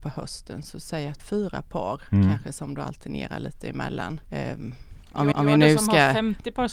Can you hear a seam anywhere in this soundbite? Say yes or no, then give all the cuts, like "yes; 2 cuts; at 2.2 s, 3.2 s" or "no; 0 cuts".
yes; 3 cuts; at 1.2 s, 4.2 s, 5.3 s